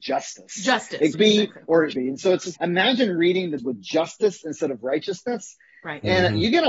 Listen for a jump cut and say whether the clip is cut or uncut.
cut